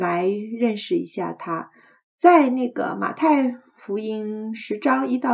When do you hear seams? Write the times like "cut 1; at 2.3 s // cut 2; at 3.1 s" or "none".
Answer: none